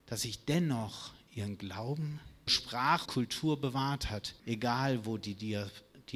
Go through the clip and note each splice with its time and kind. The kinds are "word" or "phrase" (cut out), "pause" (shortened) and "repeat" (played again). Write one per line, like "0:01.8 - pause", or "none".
0:02.5 - word
0:03.1 - word
0:04.4 - pause